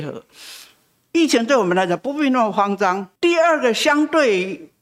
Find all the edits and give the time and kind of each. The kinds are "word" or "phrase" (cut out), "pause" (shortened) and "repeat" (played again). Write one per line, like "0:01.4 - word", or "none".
0:03.2 - pause